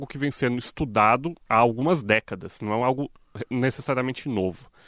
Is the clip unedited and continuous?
yes; 0 cuts

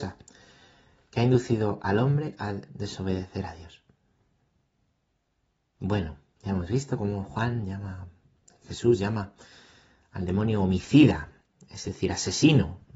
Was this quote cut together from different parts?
no; 0 cuts

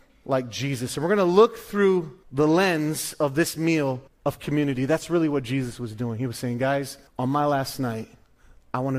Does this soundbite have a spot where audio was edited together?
yes; 3 cuts; at 2.2 s, 4.1 s, 7.1 s

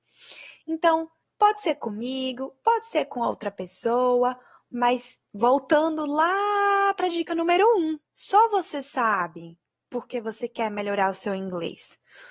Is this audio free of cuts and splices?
no; 3 cuts; at 1.2 s, 5.2 s, 8.1 s

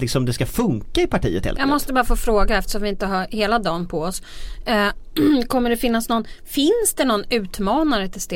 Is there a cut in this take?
no; 0 cuts

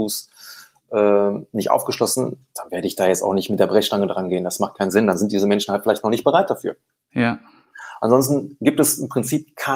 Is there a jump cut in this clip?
no; 0 cuts

